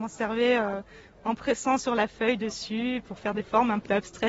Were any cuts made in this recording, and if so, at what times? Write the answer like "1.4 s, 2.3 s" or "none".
none